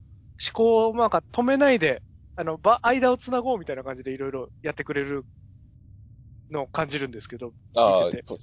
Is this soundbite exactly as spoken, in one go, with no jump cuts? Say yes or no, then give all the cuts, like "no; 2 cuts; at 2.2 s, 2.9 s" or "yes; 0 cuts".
yes; 0 cuts